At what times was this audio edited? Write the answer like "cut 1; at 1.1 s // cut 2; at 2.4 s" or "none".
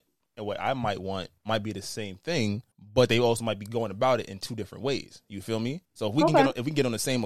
cut 1; at 1.4 s // cut 2; at 2.7 s // cut 3; at 5.8 s